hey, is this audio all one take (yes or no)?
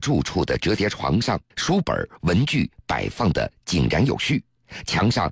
no